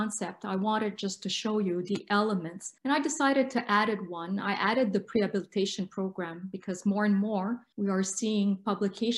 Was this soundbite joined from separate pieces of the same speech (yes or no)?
yes